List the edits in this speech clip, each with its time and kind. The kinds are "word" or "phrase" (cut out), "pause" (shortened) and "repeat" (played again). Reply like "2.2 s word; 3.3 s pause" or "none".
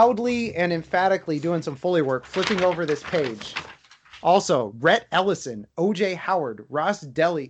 none